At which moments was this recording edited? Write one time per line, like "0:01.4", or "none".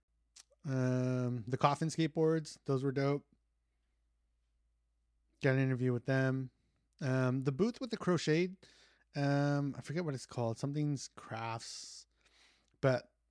none